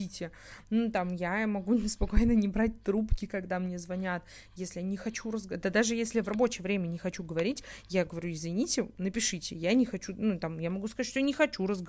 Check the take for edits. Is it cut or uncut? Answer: uncut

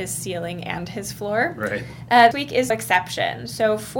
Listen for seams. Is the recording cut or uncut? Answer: cut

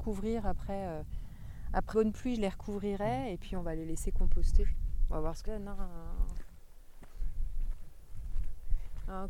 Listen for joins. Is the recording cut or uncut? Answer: cut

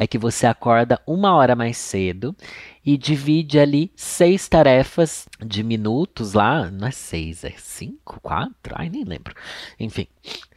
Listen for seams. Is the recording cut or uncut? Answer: uncut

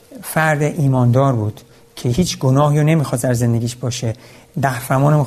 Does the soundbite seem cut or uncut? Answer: uncut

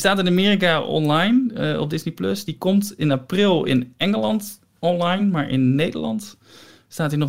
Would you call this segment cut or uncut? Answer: uncut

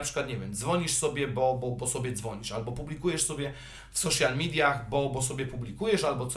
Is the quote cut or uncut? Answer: uncut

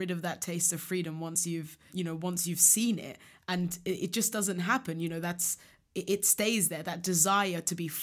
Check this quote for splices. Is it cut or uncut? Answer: uncut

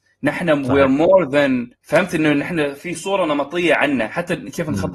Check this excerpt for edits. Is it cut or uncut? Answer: cut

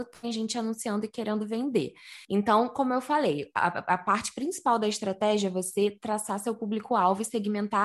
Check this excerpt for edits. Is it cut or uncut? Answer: cut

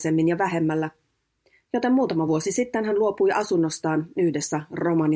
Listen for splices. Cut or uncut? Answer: uncut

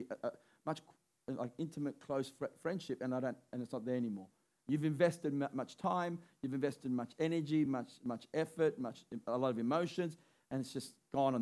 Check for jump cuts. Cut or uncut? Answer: uncut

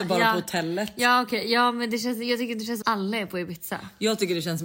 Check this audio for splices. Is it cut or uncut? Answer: cut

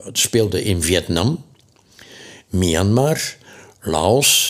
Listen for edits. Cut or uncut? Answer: uncut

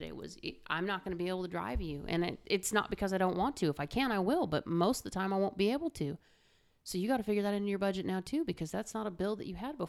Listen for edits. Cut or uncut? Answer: uncut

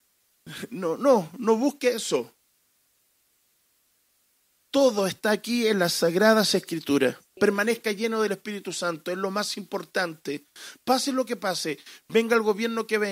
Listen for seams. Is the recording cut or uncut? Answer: uncut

